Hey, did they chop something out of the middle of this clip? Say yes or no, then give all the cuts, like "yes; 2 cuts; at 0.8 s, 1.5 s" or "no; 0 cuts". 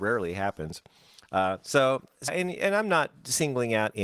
yes; 1 cut; at 2.3 s